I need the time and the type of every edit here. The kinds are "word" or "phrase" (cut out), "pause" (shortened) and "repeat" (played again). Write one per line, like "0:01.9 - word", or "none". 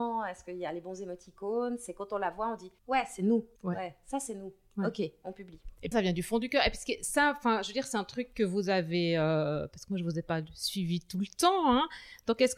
0:02.8 - pause
0:03.6 - pause
0:05.9 - word

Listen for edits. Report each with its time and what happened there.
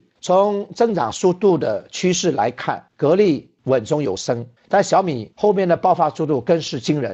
0:02.9 - pause
0:04.6 - pause

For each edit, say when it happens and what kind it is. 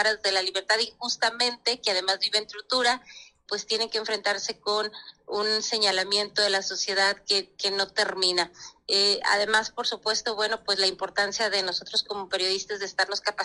0:03.5 - word

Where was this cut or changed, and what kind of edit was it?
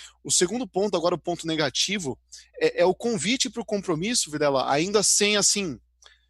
0:02.5 - word

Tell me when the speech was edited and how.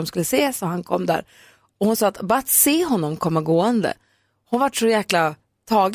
none

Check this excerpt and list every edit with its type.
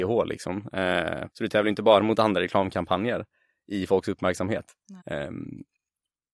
0:01.3 - pause
0:05.0 - pause

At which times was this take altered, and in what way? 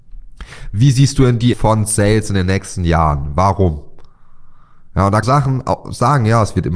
0:01.5 - word
0:05.2 - phrase

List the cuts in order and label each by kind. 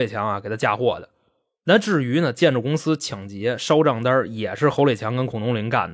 none

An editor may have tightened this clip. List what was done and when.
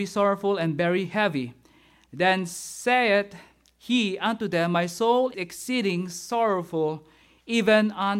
0:05.3 - word

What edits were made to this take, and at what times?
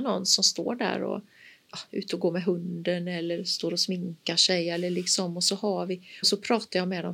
0:06.2 - word

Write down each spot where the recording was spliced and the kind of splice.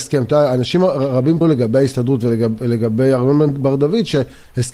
0:01.4 - word

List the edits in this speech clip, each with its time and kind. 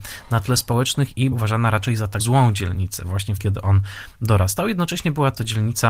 0:01.3 - word
0:02.2 - word
0:03.4 - word

